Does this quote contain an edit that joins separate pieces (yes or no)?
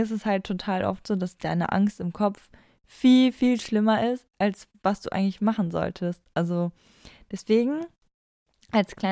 no